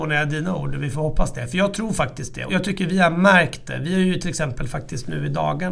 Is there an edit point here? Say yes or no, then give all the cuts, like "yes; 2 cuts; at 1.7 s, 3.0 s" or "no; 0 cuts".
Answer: yes; 1 cut; at 2.5 s